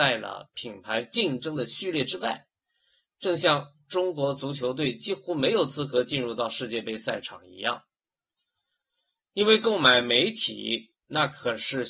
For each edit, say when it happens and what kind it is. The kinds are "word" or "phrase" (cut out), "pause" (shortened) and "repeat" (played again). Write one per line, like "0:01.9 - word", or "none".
0:11.0 - pause

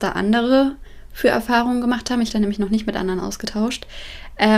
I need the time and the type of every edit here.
0:02.3 - phrase

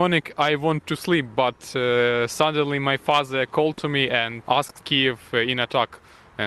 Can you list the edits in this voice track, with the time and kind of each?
0:04.5 - word
0:04.8 - phrase

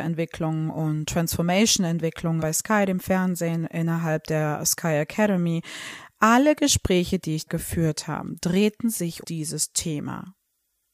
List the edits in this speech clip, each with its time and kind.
0:02.4 - phrase
0:07.5 - word
0:09.2 - word

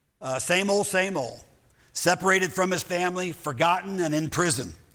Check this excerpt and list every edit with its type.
none

